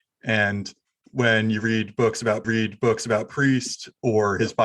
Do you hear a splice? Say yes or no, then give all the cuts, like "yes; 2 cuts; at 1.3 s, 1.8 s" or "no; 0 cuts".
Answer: yes; 1 cut; at 2.4 s